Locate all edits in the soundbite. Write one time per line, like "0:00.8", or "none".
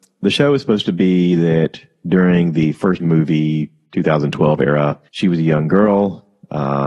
0:03.0
0:05.1

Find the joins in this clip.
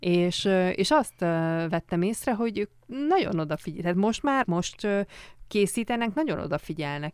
0:04.4

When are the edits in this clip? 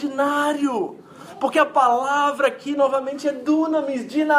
none

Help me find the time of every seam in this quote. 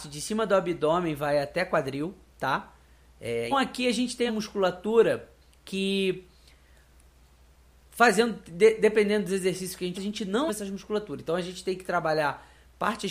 0:03.5
0:04.3
0:09.9
0:10.5

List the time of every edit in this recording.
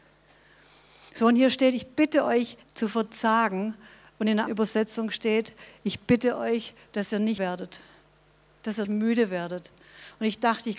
0:02.6
0:04.5
0:07.4
0:08.8

